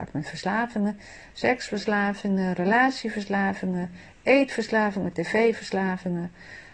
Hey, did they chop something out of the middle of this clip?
no; 0 cuts

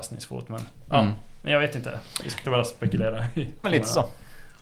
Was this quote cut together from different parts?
yes; 2 cuts; at 2.4 s, 3.6 s

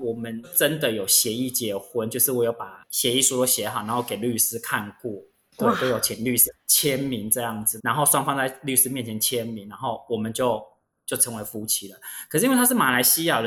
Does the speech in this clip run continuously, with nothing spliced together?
yes; 0 cuts

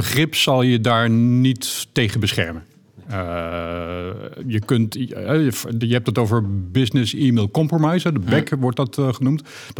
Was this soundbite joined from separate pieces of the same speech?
no; 0 cuts

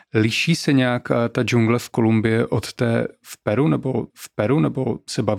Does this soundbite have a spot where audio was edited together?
yes; 1 cut; at 4.1 s

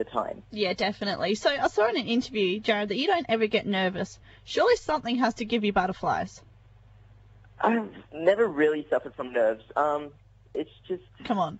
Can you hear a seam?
no; 0 cuts

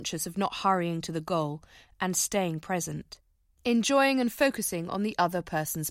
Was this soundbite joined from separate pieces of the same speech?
no; 0 cuts

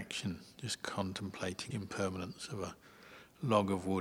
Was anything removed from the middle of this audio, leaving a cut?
yes; 1 cut; at 1.7 s

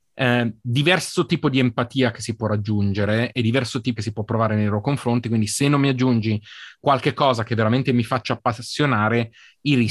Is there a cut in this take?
yes; 1 cut; at 4.0 s

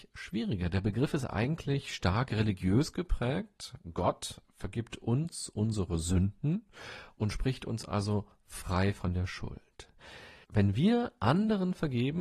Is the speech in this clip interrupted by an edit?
no; 0 cuts

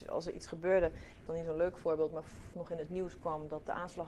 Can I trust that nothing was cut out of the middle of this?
no; 2 cuts; at 1.3 s, 2.5 s

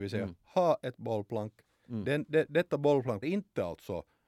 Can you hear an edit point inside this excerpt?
yes; 1 cut; at 3.2 s

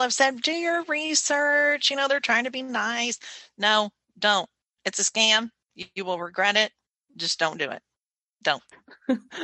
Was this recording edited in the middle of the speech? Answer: no; 0 cuts

